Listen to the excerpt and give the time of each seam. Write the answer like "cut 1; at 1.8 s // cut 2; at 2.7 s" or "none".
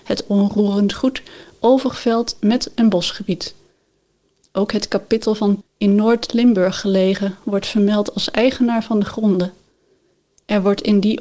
cut 1; at 5.6 s